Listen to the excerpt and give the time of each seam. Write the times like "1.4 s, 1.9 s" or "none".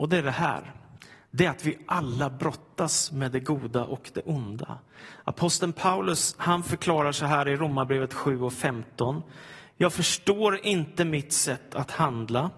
none

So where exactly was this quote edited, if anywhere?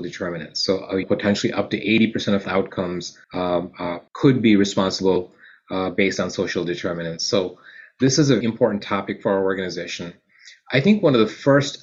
1.0 s, 2.4 s, 3.2 s, 4.1 s, 8.4 s

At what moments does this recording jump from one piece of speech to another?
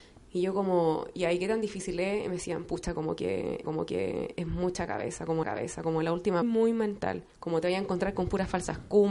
3.6 s, 5.4 s, 6.4 s, 7.3 s

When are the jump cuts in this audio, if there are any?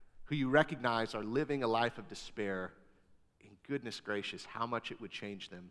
none

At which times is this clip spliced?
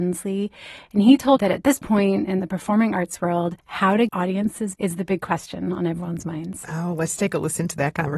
1.4 s, 3.6 s, 4.1 s, 4.7 s

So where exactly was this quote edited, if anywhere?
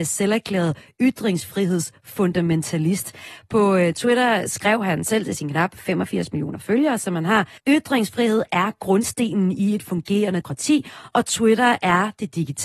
7.6 s, 10.4 s

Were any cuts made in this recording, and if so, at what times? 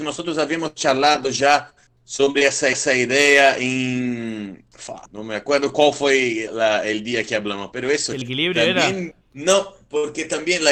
2.7 s, 5.1 s, 6.5 s, 8.2 s, 9.2 s

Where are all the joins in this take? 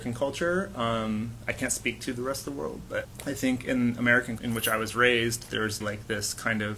4.4 s, 5.8 s

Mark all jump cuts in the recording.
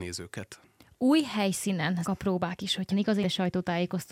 2.0 s, 2.9 s, 3.2 s

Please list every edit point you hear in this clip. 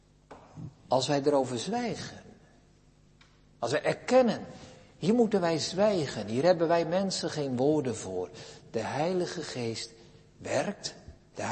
none

